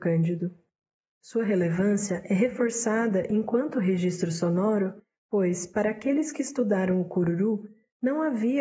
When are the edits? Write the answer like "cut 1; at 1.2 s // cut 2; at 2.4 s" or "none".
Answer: none